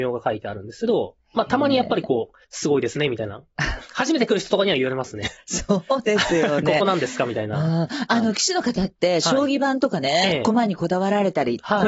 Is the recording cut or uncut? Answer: cut